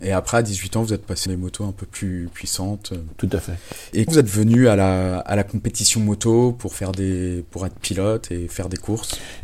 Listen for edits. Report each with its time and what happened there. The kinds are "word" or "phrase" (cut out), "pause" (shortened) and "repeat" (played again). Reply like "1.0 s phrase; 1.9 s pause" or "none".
1.3 s word; 4.1 s word